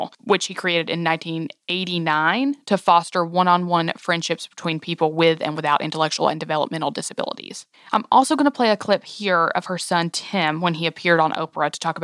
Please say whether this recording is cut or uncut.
uncut